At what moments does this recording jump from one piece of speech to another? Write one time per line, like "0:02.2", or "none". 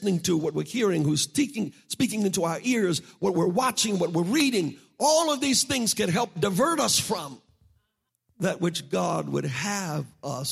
0:08.1